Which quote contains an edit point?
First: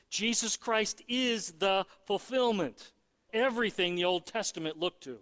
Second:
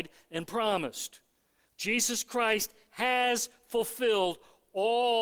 first; 1 cut; at 3.3 s

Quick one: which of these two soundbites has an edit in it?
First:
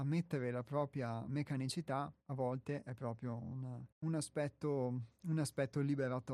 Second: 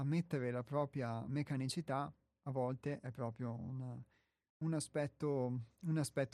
first; 2 cuts; at 2.2 s, 3.9 s

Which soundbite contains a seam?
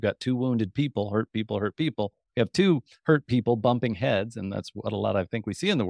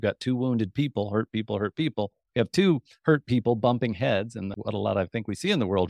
second; 1 cut; at 4.5 s

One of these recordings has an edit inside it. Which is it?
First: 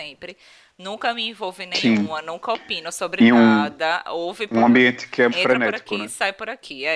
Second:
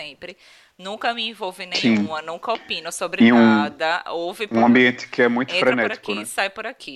first; 1 cut; at 5.3 s

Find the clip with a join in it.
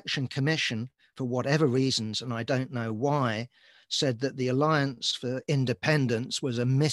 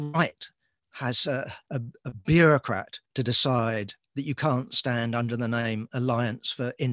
second; 2 cuts; at 1.6 s, 3.1 s

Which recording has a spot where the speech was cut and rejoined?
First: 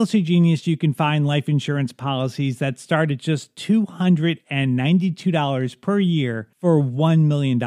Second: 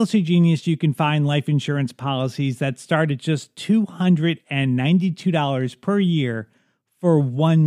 first; 1 cut; at 6.5 s

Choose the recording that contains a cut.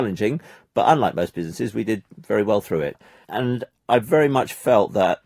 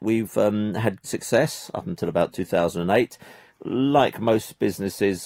second; 1 cut; at 1.0 s

